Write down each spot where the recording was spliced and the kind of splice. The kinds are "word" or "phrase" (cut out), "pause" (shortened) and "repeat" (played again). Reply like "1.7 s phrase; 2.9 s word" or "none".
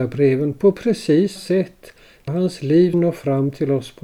1.4 s word; 2.3 s phrase; 2.9 s word